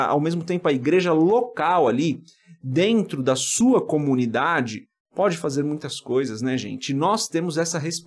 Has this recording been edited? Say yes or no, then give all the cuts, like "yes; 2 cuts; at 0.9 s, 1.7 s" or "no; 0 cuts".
no; 0 cuts